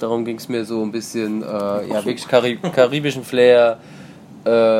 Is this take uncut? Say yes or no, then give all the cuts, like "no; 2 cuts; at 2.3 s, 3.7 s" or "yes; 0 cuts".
yes; 0 cuts